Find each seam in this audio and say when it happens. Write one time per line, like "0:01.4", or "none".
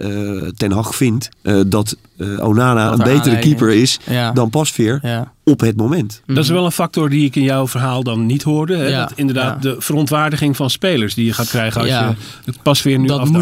0:01.3
0:05.4